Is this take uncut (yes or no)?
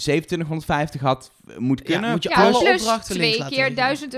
yes